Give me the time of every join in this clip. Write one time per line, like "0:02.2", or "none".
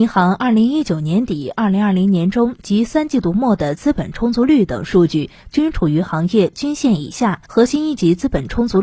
0:07.4